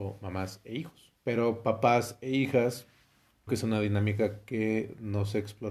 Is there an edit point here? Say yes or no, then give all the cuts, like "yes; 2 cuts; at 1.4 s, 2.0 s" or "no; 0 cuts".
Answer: yes; 2 cuts; at 1.2 s, 3.5 s